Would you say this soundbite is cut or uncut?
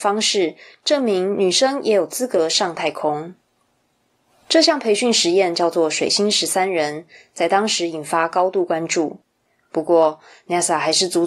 uncut